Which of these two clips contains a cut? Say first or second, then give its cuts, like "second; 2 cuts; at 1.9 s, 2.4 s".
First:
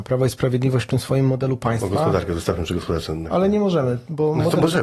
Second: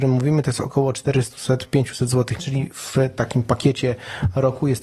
second; 1 cut; at 2.4 s